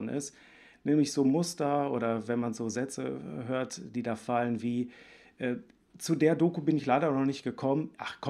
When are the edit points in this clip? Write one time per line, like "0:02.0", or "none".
none